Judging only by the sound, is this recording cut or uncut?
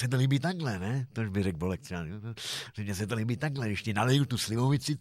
uncut